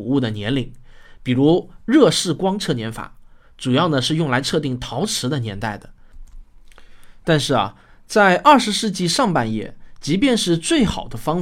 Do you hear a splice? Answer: no; 0 cuts

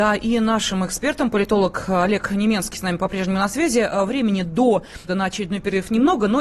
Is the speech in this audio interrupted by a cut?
yes; 1 cut; at 5.1 s

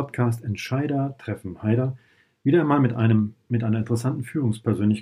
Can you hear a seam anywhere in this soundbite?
no; 0 cuts

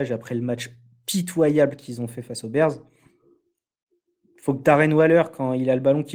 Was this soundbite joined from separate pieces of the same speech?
no; 0 cuts

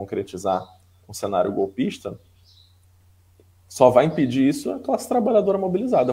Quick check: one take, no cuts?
yes; 0 cuts

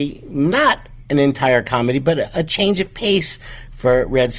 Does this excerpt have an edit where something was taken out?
no; 0 cuts

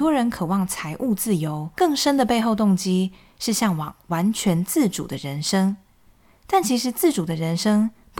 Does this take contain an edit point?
yes; 1 cut; at 1.7 s

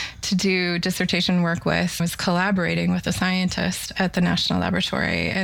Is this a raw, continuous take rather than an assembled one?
no; 1 cut; at 2.0 s

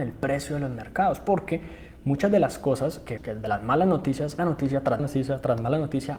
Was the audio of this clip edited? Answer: yes; 3 cuts; at 3.2 s, 4.4 s, 5.0 s

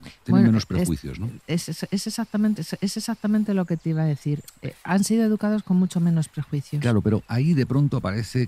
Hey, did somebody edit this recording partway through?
yes; 1 cut; at 2.6 s

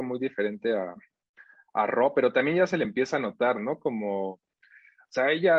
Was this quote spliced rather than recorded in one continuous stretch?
no; 0 cuts

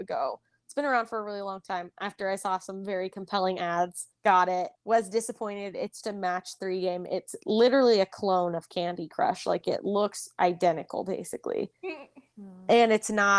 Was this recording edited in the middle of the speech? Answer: yes; 3 cuts; at 4.1 s, 4.7 s, 6.0 s

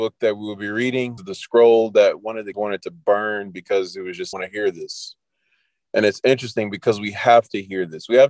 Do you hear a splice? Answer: yes; 3 cuts; at 1.2 s, 2.5 s, 4.3 s

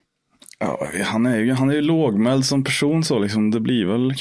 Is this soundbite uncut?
yes; 0 cuts

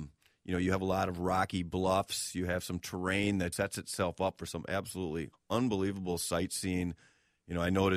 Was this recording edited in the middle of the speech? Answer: yes; 1 cut; at 3.5 s

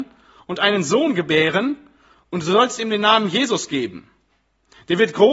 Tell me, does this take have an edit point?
no; 0 cuts

